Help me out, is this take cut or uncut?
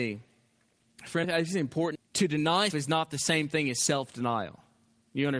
cut